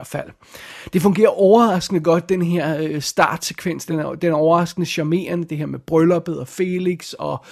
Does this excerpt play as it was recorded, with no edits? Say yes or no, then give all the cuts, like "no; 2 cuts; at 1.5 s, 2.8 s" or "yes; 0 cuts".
yes; 0 cuts